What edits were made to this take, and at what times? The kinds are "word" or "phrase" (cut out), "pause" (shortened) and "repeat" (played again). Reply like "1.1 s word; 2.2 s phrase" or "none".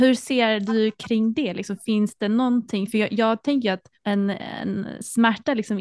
3.9 s pause